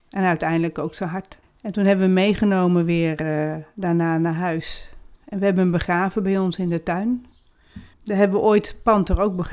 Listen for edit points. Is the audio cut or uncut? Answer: cut